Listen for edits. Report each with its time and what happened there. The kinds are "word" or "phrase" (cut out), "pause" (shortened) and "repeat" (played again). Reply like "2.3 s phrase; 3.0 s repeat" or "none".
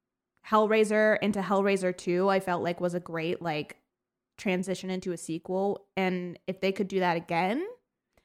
none